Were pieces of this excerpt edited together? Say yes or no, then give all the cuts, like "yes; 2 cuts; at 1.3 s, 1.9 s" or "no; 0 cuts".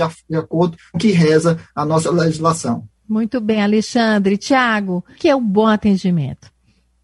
yes; 3 cuts; at 0.9 s, 3.0 s, 5.1 s